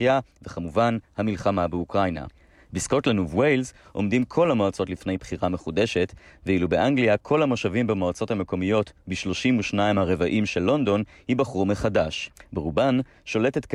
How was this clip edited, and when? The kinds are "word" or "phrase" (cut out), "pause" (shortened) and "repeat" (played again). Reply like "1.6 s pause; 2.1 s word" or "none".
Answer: none